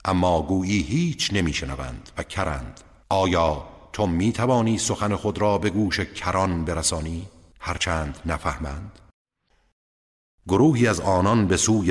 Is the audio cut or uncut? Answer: uncut